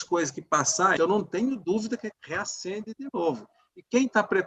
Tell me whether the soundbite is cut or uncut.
cut